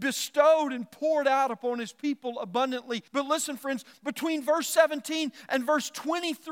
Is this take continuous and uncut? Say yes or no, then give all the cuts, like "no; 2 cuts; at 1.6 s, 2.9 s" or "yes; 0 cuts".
no; 1 cut; at 3.1 s